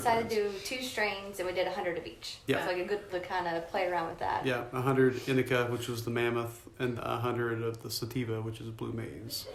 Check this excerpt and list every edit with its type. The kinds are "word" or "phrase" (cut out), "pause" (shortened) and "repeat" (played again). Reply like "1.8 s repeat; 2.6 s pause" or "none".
2.7 s phrase; 3.1 s word; 7.0 s word